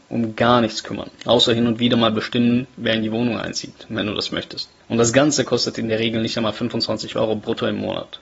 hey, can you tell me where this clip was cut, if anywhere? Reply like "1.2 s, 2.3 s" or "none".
1.1 s